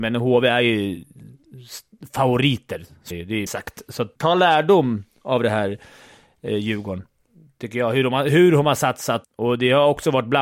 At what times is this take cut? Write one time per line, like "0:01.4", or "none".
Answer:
0:03.1
0:03.5
0:04.2
0:09.2